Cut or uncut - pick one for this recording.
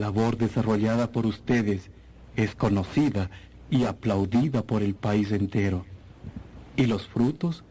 uncut